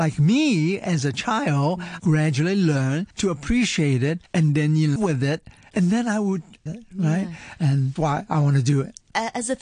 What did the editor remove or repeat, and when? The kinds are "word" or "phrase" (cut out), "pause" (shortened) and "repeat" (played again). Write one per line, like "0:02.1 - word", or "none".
0:02.0 - word
0:03.1 - pause
0:04.3 - pause
0:05.0 - word
0:06.7 - phrase
0:08.0 - word